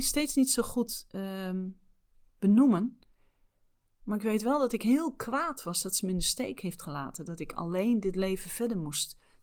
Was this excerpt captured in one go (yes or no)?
yes